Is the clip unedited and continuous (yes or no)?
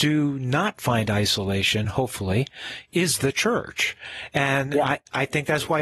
yes